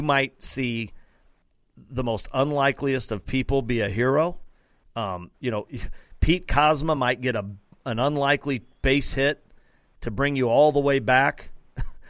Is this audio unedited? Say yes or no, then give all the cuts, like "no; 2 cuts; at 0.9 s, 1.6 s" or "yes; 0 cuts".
yes; 0 cuts